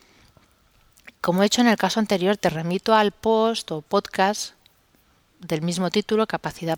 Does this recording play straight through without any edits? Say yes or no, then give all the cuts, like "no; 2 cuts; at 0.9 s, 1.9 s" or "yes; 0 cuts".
yes; 0 cuts